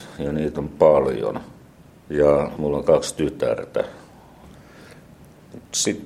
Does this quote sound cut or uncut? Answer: cut